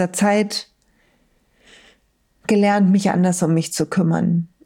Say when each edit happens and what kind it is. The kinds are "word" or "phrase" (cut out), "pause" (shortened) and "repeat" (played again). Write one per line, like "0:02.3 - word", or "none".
none